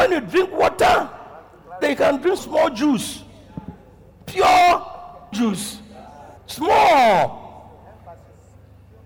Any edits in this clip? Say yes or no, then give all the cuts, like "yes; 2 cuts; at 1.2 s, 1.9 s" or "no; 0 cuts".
yes; 4 cuts; at 1.8 s, 2.4 s, 5.3 s, 6.4 s